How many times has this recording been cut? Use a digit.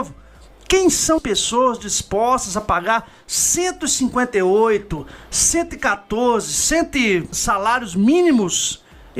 2